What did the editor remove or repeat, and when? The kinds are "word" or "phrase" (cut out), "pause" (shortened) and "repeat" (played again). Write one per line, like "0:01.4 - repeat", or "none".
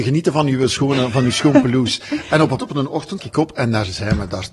0:02.6 - phrase
0:03.2 - word